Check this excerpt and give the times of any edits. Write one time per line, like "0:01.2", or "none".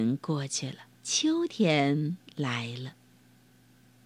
0:01.0

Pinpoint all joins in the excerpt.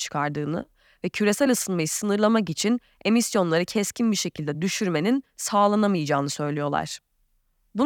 none

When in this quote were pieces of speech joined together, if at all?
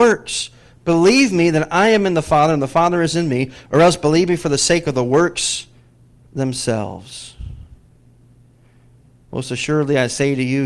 none

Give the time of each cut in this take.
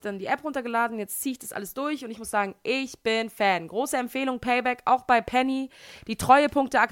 none

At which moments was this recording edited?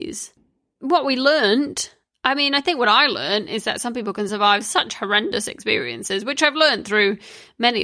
none

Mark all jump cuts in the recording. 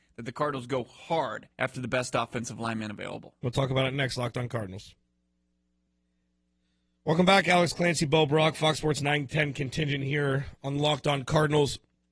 0:01.5

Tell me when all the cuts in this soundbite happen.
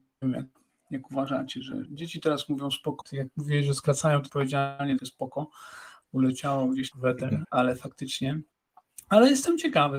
0:01.9
0:03.0
0:04.3
0:05.0
0:06.9
0:07.4

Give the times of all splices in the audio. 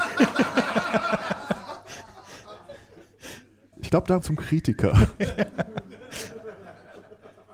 0:03.7
0:04.2

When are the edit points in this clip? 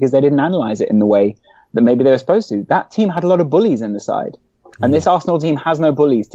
none

